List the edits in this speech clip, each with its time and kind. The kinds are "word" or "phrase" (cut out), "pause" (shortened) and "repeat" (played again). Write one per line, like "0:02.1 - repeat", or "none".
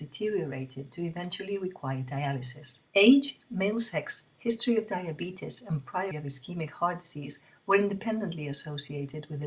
0:02.9 - pause
0:06.1 - word